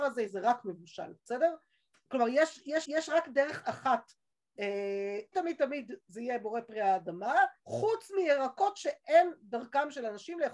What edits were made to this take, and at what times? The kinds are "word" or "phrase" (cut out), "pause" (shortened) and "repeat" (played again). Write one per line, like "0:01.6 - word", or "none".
0:01.2 - pause
0:02.8 - repeat
0:05.3 - word
0:07.6 - pause